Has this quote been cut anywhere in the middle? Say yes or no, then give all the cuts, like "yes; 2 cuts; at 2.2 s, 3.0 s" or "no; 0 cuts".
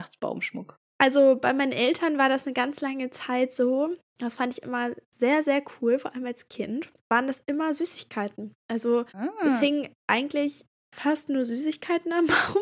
yes; 1 cut; at 9.1 s